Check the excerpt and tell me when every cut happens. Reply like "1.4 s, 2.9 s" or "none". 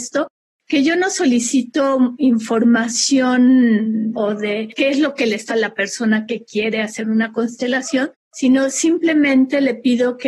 4.1 s, 5.5 s, 8.2 s